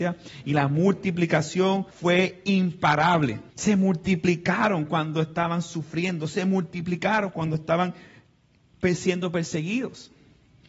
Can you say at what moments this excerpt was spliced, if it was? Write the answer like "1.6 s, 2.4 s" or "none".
1.9 s, 3.5 s